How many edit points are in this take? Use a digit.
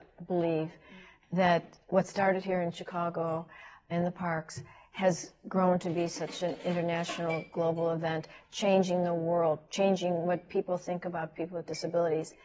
0